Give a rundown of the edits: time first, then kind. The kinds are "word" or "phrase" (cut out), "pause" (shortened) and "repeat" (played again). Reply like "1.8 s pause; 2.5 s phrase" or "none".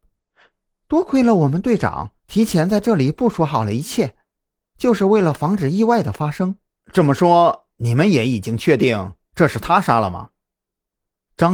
2.2 s pause; 6.7 s pause